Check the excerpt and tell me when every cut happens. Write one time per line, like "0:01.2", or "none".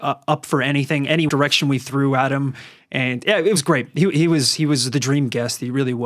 0:01.3

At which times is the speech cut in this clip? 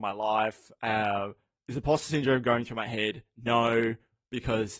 none

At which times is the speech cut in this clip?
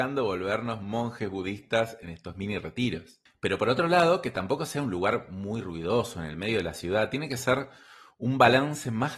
none

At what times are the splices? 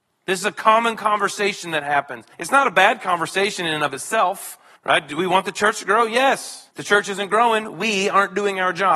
0:02.3
0:04.8
0:06.7

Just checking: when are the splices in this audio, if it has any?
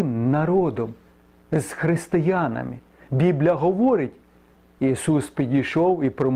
none

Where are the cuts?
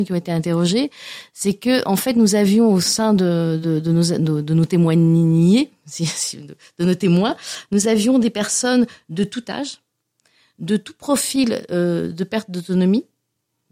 none

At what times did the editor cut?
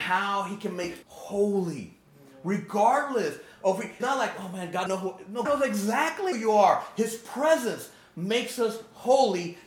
0:01.0
0:04.0
0:04.9
0:05.4
0:06.3

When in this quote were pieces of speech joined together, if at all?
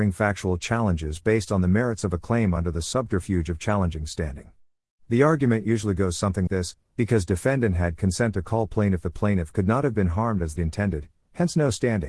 0:06.5
0:10.6

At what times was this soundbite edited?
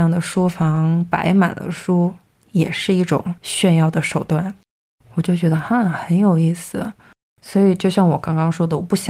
none

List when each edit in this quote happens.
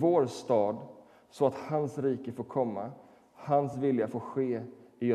none

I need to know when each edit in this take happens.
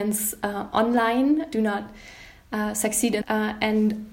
0:01.5
0:03.2

